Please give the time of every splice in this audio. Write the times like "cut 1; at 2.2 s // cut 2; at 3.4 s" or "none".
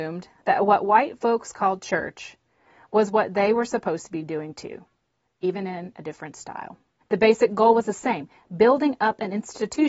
cut 1; at 7.0 s

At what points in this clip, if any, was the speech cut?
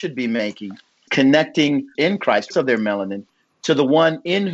cut 1; at 1.1 s // cut 2; at 1.9 s // cut 3; at 2.5 s

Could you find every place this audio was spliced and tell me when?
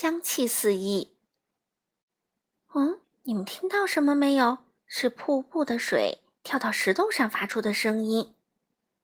cut 1; at 3.0 s // cut 2; at 4.8 s

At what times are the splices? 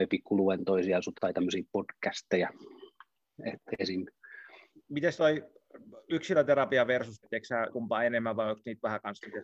cut 1; at 1.1 s // cut 2; at 5.1 s // cut 3; at 7.2 s // cut 4; at 7.7 s

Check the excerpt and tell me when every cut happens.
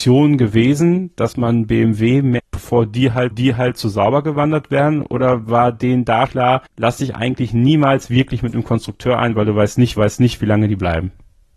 cut 1; at 2.4 s // cut 2; at 3.3 s // cut 3; at 6.3 s // cut 4; at 6.7 s // cut 5; at 10.0 s

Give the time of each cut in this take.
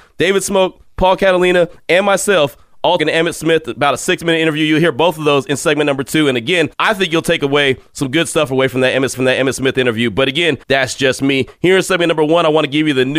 cut 1; at 3.0 s // cut 2; at 6.7 s // cut 3; at 9.1 s // cut 4; at 10.6 s

